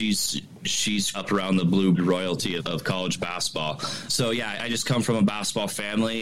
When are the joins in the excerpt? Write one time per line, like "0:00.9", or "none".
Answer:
0:01.1
0:01.9
0:02.6
0:04.1
0:04.6